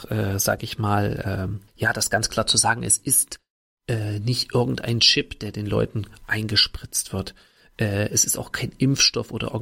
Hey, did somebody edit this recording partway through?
no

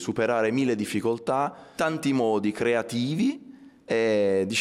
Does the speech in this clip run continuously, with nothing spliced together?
no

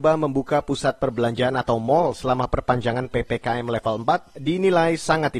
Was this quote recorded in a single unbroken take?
yes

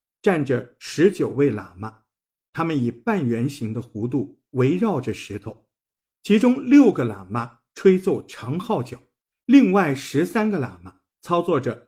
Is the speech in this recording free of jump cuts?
yes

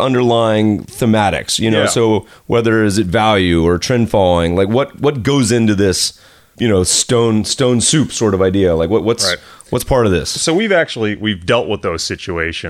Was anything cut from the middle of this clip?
no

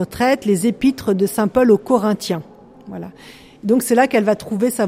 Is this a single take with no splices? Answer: yes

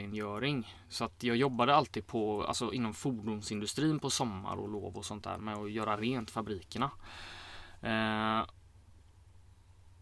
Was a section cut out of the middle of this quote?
no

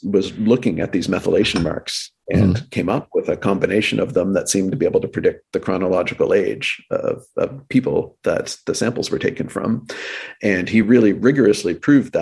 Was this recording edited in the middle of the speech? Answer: no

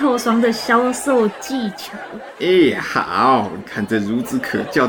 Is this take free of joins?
yes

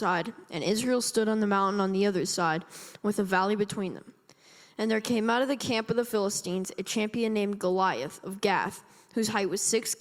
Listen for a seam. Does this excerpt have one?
no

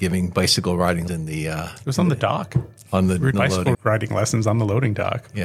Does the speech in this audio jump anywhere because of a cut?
yes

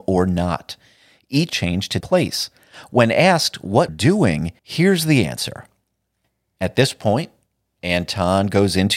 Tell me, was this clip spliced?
yes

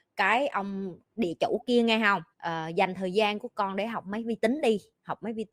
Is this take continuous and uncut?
no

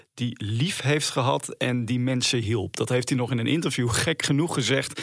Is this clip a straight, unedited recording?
yes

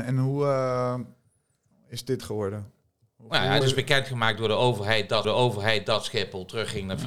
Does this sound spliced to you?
yes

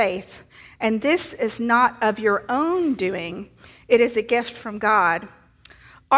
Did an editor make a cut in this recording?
no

